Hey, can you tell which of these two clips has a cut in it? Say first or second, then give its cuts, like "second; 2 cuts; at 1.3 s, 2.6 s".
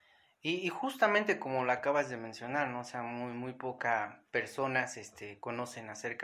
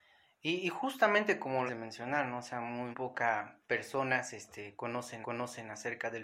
second; 3 cuts; at 1.7 s, 2.9 s, 5.2 s